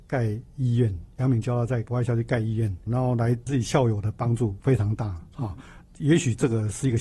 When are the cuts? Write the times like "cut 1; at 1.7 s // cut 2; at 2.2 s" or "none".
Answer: none